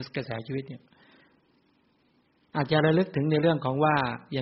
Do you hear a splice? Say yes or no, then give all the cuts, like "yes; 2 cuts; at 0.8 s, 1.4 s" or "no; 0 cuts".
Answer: no; 0 cuts